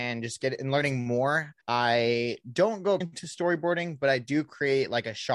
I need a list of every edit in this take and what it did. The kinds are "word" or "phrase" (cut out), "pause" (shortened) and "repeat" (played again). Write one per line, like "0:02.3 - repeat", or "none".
0:01.6 - pause
0:03.0 - word